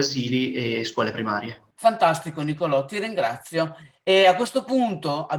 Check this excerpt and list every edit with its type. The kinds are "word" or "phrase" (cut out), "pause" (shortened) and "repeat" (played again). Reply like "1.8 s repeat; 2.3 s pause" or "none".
1.7 s pause